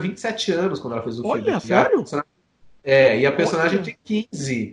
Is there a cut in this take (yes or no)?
no